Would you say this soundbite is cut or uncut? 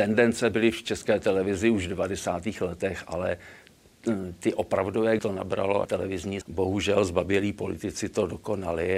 cut